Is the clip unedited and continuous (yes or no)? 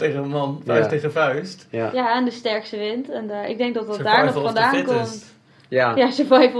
yes